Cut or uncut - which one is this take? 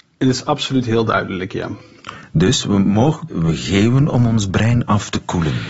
cut